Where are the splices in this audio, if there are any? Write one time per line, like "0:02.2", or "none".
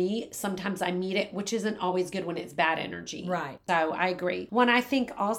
none